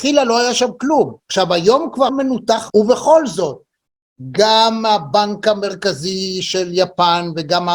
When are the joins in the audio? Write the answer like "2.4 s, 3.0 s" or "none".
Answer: 1.2 s, 2.1 s, 2.7 s